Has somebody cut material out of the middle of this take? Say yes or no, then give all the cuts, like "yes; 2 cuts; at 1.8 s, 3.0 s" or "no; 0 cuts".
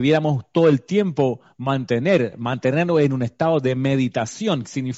no; 0 cuts